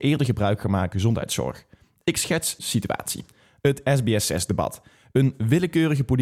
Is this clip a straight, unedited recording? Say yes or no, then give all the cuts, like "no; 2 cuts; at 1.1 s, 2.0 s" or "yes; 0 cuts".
no; 2 cuts; at 0.9 s, 2.6 s